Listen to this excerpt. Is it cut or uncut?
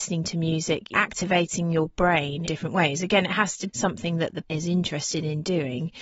cut